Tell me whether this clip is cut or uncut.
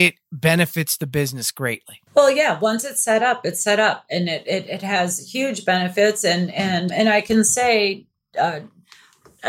cut